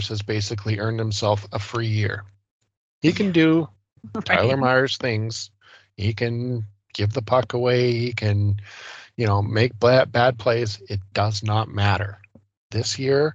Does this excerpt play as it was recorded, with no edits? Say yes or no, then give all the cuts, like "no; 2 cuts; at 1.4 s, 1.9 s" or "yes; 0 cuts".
yes; 0 cuts